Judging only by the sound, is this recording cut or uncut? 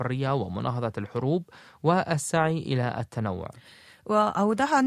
uncut